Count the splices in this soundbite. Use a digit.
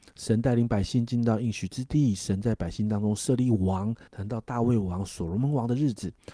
1